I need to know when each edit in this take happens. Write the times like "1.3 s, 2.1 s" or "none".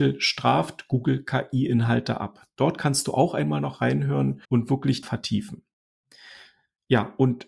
4.4 s, 5.0 s